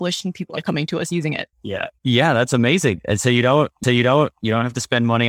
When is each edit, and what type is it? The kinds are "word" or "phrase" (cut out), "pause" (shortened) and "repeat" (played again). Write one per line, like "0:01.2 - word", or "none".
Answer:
0:01.5 - pause
0:03.8 - repeat